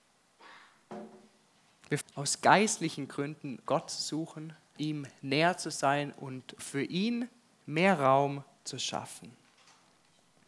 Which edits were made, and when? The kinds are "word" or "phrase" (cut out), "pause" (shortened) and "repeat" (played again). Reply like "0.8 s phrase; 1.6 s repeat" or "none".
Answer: 2.0 s word; 3.7 s word; 4.8 s word; 6.6 s word